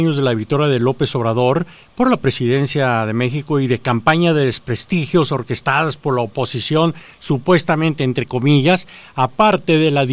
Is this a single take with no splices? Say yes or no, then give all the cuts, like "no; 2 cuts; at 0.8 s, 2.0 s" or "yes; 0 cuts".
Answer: yes; 0 cuts